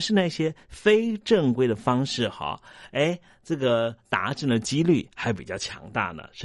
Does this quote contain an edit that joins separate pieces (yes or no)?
no